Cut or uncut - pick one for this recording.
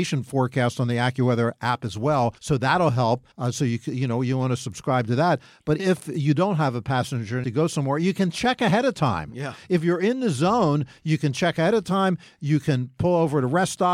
cut